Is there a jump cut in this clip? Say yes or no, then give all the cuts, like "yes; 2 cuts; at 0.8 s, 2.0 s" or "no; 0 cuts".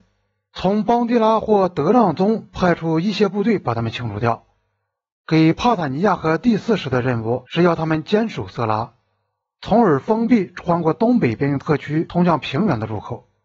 no; 0 cuts